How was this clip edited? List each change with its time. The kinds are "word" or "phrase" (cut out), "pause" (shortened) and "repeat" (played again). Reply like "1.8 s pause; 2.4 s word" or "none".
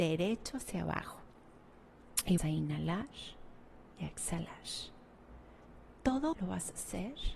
2.4 s word; 6.3 s word